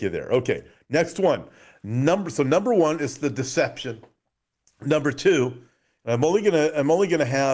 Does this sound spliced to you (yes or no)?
no